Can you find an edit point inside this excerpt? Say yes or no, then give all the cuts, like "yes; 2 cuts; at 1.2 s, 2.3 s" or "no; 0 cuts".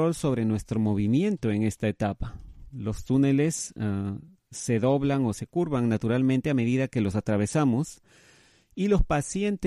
no; 0 cuts